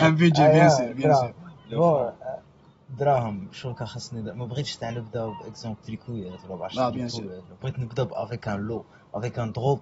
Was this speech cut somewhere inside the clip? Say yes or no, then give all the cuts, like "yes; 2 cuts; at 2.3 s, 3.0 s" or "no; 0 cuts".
yes; 1 cut; at 5.8 s